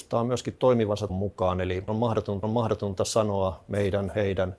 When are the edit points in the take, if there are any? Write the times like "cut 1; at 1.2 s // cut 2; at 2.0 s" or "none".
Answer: cut 1; at 1.1 s // cut 2; at 1.9 s // cut 3; at 2.4 s